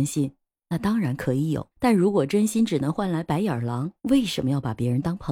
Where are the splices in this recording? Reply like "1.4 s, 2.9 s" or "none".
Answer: 1.7 s, 4.0 s